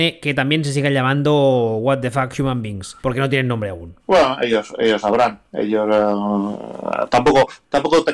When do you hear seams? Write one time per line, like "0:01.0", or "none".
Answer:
0:03.0
0:04.0

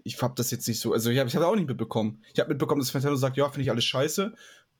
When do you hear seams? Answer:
none

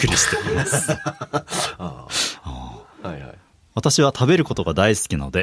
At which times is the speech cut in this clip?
none

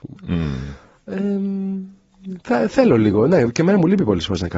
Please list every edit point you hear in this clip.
none

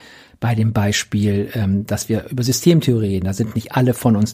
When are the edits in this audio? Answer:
none

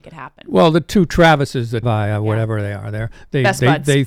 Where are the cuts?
0:01.8

